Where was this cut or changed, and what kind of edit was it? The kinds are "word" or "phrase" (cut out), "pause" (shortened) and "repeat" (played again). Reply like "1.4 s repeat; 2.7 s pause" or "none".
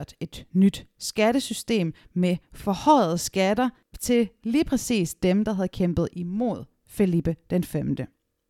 none